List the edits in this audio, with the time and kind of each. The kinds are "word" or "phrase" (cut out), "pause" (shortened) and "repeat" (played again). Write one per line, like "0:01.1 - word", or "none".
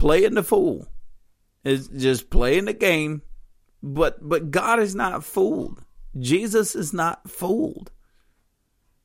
0:01.9 - word